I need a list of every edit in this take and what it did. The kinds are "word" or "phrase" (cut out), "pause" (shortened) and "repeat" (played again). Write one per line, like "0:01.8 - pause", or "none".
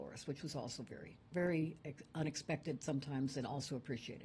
0:01.3 - pause